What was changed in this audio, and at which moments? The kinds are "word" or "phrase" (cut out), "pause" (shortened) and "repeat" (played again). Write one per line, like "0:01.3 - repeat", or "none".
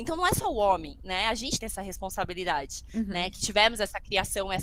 0:01.6 - word